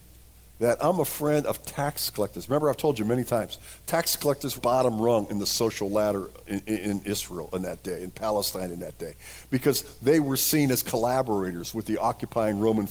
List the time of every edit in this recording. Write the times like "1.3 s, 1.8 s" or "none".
4.6 s

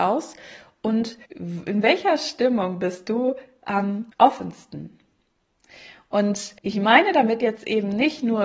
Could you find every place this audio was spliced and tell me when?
1.3 s, 4.1 s, 6.6 s

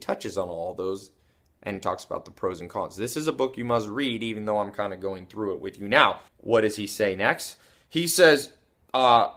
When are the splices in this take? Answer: 6.3 s

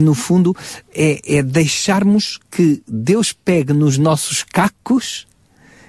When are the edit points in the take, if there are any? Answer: none

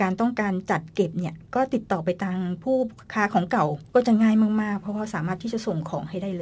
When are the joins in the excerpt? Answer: 3.9 s

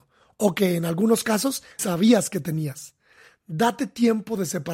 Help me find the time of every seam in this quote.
1.8 s

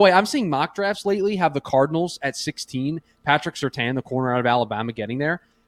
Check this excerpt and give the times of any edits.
none

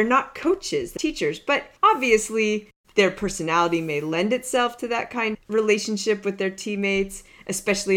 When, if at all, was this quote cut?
1.0 s, 1.8 s, 5.3 s

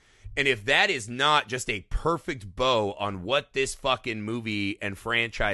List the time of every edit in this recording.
none

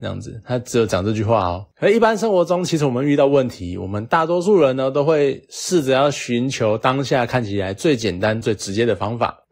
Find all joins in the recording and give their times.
8.4 s

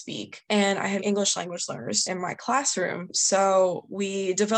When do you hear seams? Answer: 1.0 s, 2.0 s

